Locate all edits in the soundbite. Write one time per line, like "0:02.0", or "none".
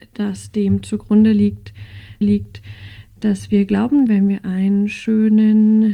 0:02.2
0:04.1

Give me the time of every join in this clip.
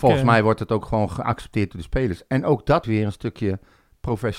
0:02.8

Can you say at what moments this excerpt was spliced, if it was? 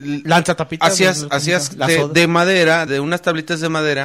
0:02.9

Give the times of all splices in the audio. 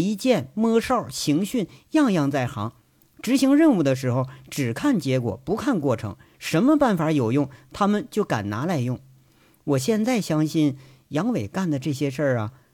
none

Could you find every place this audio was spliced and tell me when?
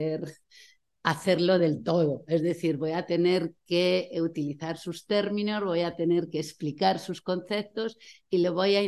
none

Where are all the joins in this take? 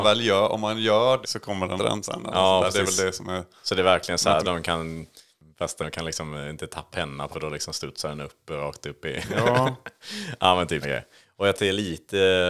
0:01.2
0:01.8
0:04.4
0:05.8
0:06.9
0:07.3
0:10.8
0:11.5

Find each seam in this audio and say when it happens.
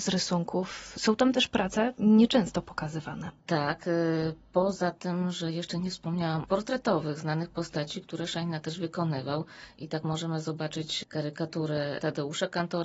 0:06.4

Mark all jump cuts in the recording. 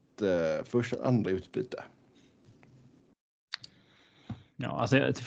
0:00.9
0:01.2

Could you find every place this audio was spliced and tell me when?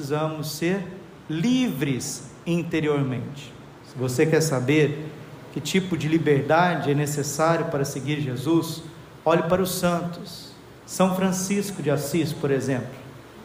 0:10.8

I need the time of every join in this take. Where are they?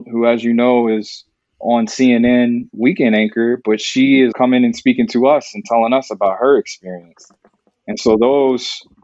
0:01.5
0:04.3

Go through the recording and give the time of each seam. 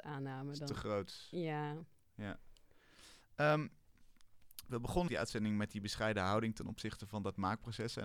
0:05.1

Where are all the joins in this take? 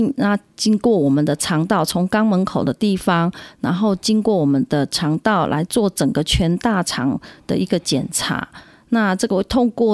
none

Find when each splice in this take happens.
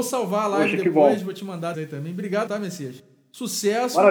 0:01.7
0:02.5

